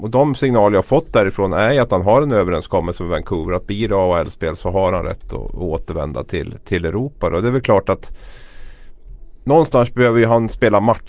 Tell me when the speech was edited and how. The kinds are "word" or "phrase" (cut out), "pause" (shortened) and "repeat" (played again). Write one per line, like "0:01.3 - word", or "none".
none